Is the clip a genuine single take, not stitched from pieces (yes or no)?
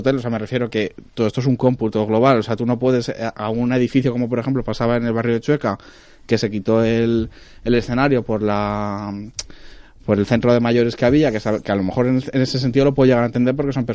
yes